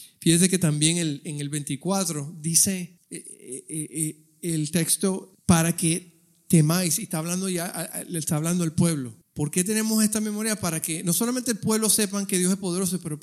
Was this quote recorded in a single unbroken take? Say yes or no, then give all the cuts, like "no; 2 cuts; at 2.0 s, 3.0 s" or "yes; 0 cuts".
yes; 0 cuts